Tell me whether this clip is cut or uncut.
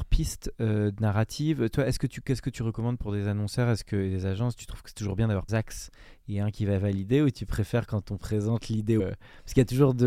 cut